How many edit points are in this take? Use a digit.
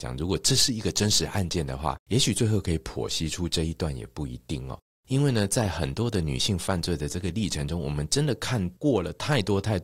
2